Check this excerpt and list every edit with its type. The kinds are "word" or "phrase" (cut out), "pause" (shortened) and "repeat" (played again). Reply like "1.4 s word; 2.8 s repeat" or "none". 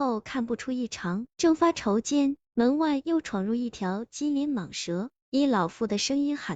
1.3 s pause; 2.4 s pause